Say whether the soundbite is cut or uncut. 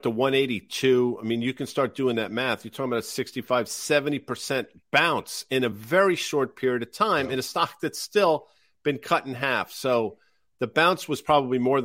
uncut